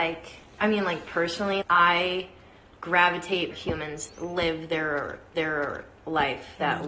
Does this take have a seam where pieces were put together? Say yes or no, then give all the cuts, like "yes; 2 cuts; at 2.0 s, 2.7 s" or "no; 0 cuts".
yes; 4 cuts; at 1.6 s, 3.5 s, 4.1 s, 5.3 s